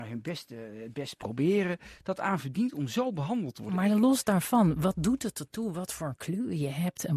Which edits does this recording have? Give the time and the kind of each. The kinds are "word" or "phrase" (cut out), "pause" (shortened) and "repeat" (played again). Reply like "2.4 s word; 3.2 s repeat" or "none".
none